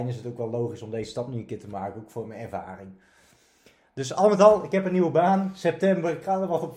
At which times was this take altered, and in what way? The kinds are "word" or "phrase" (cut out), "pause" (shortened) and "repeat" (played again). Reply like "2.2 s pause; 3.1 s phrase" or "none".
none

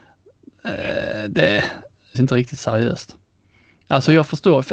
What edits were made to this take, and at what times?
2.1 s word

